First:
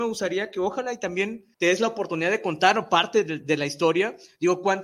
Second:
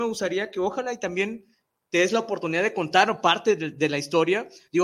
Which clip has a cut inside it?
first; 1 cut; at 1.5 s

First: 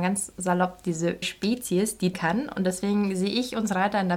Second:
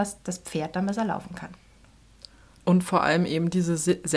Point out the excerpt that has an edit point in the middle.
first; 2 cuts; at 1.2 s, 2.1 s

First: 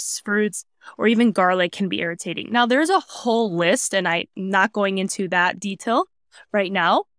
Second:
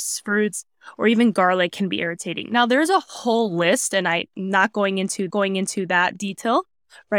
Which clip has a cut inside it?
second; 1 cut; at 5.3 s

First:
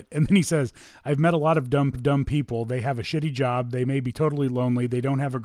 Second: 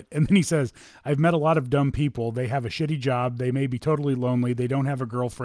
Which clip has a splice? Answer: first; 1 cut; at 1.9 s

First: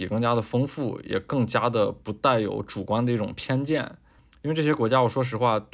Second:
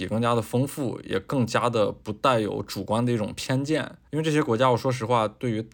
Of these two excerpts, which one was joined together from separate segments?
second; 1 cut; at 4.1 s

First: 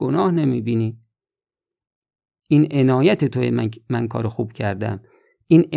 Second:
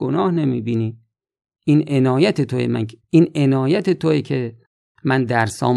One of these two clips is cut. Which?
second; 2 cuts; at 1.4 s, 3.0 s

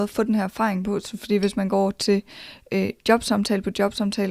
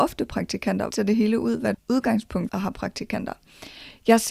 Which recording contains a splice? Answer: second; 3 cuts; at 0.9 s, 1.7 s, 2.5 s

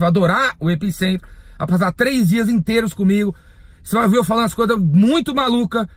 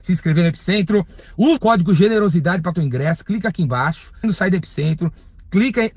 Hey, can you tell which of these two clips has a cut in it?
second; 3 cuts; at 1.6 s, 2.7 s, 4.2 s

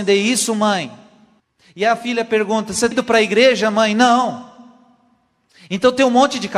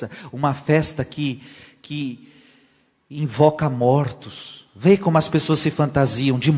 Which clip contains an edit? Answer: first; 2 cuts; at 1.4 s, 2.9 s

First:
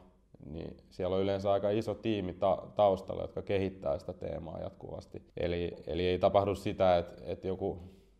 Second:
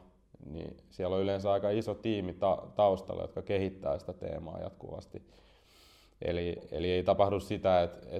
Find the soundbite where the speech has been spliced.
first; 1 cut; at 5.3 s

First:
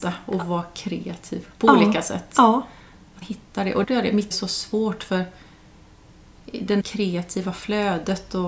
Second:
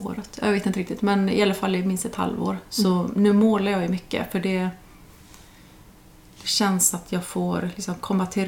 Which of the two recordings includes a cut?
first; 4 cuts; at 3.2 s, 3.8 s, 4.3 s, 6.8 s

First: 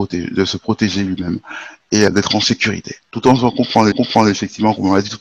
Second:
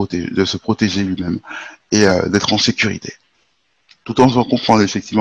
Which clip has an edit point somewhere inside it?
first; 3 cuts; at 2.1 s, 3.0 s, 3.9 s

